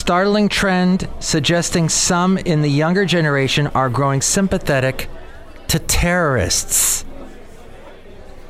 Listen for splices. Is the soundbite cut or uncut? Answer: uncut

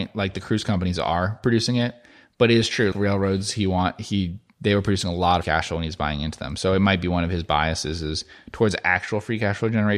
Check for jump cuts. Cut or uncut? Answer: cut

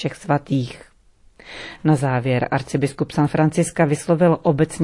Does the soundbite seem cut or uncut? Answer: uncut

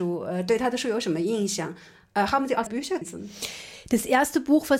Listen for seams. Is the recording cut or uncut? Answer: cut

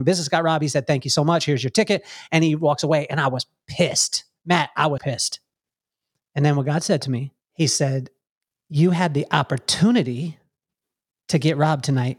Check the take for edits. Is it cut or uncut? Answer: cut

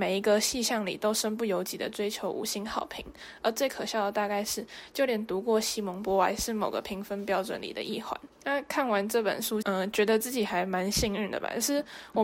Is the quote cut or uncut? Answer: cut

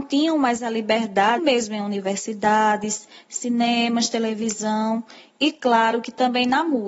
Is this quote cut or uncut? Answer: cut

